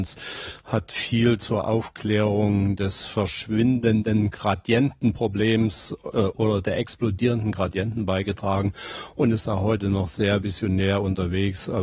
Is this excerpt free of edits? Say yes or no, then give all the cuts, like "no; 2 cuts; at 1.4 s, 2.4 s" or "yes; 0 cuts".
yes; 0 cuts